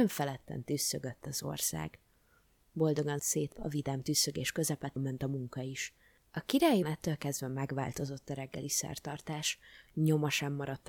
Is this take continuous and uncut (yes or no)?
no